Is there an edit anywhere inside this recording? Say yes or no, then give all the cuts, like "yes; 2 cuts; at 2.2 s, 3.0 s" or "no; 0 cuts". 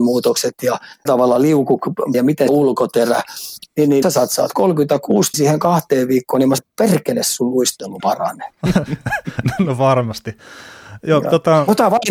yes; 7 cuts; at 1.1 s, 2.1 s, 2.5 s, 4.0 s, 5.3 s, 6.6 s, 8.0 s